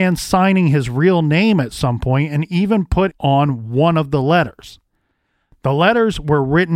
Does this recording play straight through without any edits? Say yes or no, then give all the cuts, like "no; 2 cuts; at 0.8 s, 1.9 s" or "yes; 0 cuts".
no; 1 cut; at 3.1 s